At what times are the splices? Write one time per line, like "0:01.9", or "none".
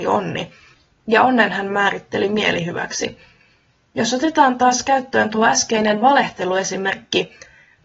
none